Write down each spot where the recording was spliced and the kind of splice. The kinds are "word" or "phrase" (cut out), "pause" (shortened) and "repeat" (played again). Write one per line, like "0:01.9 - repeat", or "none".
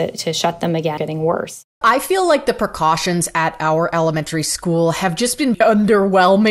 0:01.0 - phrase
0:01.8 - word
0:05.5 - word

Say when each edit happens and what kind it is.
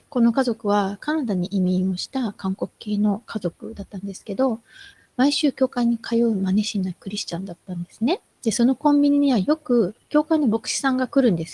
0:04.9 - pause
0:08.3 - pause

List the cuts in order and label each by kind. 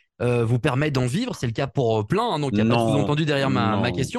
none

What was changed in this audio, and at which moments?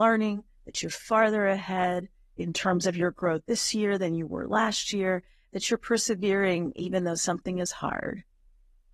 none

